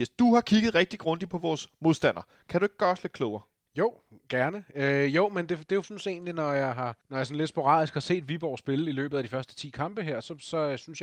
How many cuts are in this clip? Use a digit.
2